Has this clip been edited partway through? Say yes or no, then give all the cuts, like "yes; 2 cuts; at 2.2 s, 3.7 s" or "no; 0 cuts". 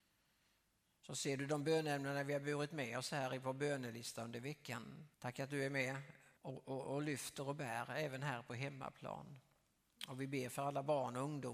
yes; 2 cuts; at 5.1 s, 6.4 s